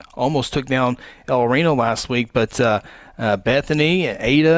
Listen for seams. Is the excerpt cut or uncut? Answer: uncut